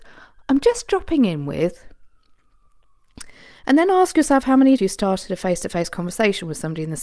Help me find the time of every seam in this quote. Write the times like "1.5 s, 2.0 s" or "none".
4.8 s